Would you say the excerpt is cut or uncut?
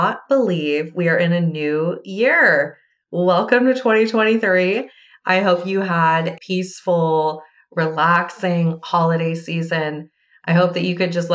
cut